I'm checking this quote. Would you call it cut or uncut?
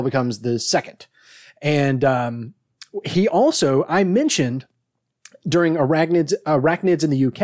uncut